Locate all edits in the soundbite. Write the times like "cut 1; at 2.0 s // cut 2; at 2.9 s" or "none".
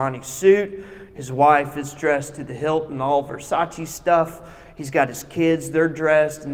none